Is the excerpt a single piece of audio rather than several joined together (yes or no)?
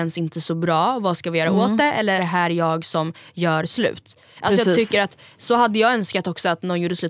no